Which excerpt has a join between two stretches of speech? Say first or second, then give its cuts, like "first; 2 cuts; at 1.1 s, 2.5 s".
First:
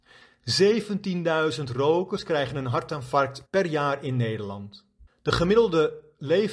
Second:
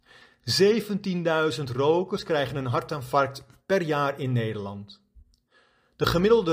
first; 2 cuts; at 3.5 s, 5.1 s